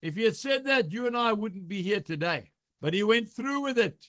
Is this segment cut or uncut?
uncut